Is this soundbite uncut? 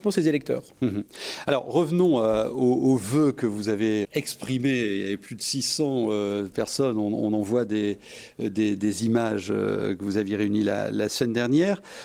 no; 1 cut; at 4.0 s

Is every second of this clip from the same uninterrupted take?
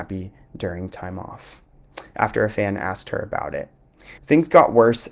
no; 1 cut; at 4.2 s

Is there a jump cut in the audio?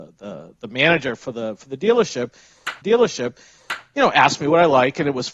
yes; 1 cut; at 2.8 s

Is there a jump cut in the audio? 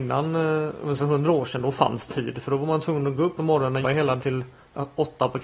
yes; 5 cuts; at 1.0 s, 2.1 s, 3.4 s, 3.8 s, 4.2 s

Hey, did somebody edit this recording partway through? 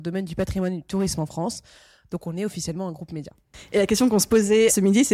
no; 0 cuts

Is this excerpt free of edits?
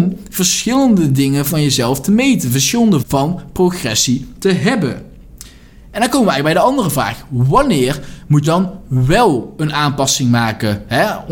no; 2 cuts; at 3.0 s, 8.4 s

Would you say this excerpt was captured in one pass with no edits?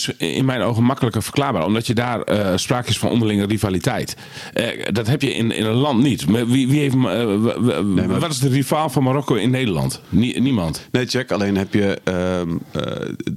yes; 0 cuts

